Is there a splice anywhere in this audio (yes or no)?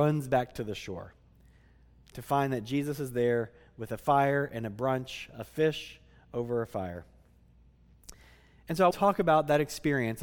yes